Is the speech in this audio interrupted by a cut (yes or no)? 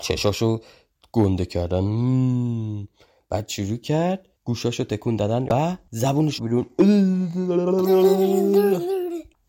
yes